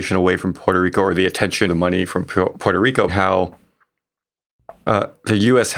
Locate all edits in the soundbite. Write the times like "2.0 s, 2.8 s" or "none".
1.7 s, 3.1 s